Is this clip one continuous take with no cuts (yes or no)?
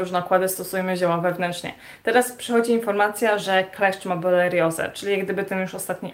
yes